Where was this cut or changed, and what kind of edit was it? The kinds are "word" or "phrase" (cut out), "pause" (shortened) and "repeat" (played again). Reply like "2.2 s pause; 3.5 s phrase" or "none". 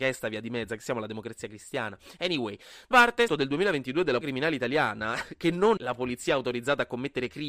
2.9 s word; 3.3 s phrase; 4.2 s word; 5.8 s word